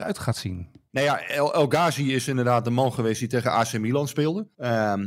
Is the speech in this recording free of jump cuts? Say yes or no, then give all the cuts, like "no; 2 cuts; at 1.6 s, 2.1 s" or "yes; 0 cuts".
yes; 0 cuts